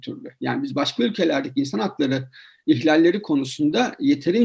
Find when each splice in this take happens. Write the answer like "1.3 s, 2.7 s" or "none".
none